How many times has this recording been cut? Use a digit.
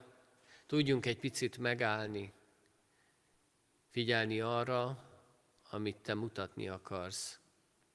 0